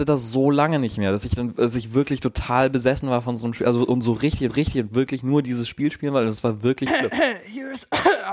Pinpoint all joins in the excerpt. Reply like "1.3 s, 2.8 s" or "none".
4.5 s, 6.9 s